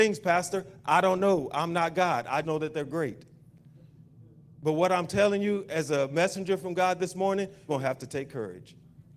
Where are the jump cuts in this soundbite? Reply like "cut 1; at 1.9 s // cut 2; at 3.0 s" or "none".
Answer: cut 1; at 2.4 s // cut 2; at 7.7 s